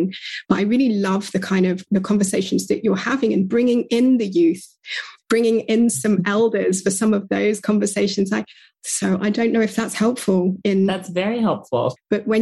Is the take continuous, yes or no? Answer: yes